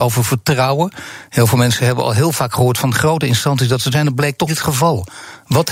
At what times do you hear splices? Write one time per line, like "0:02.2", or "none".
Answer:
0:03.9
0:04.5